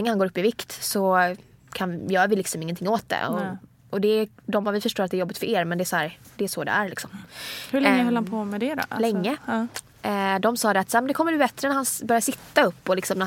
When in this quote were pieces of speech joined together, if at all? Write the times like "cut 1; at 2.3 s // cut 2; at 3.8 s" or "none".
none